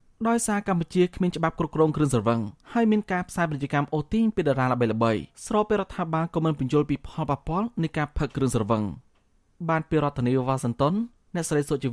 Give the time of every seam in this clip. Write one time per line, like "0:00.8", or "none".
0:02.6
0:05.3